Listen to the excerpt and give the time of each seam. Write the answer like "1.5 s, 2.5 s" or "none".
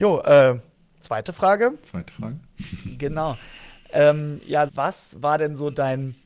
4.7 s